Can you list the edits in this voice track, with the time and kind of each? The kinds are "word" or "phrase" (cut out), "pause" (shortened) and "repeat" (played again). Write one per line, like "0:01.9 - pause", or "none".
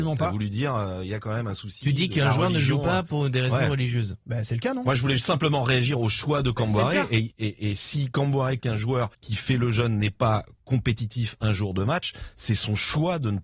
0:08.6 - word

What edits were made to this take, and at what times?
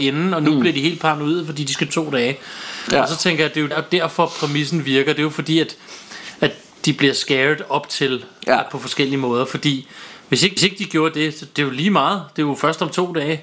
0:01.9 - phrase
0:03.7 - word
0:10.6 - repeat

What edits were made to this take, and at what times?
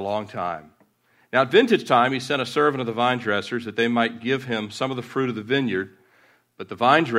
none

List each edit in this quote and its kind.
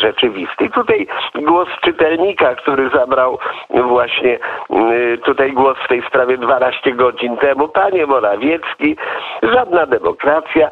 none

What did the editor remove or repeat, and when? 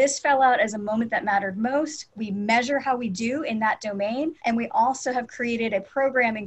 0:04.4 - pause

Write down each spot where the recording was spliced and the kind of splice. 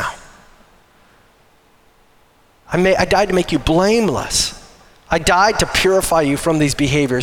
none

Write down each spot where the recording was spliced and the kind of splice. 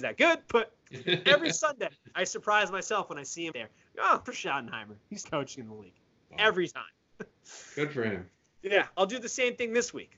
0:03.5 - word
0:04.3 - word
0:05.2 - word

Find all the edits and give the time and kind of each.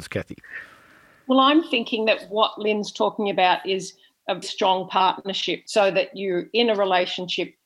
0:04.4 - word

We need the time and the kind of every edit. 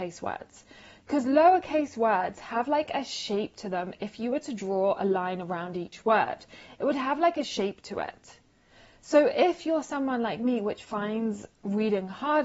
none

